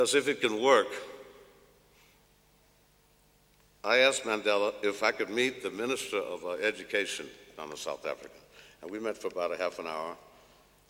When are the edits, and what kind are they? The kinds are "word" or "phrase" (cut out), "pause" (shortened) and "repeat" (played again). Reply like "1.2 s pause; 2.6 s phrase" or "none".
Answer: none